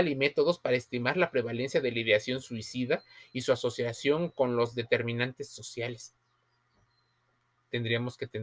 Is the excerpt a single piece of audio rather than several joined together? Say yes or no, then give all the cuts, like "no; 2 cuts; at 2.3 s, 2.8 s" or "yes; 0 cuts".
yes; 0 cuts